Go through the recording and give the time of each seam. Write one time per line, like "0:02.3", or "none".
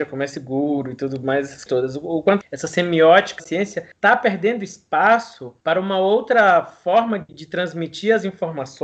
0:01.7
0:02.4
0:03.4
0:03.9
0:05.6
0:07.3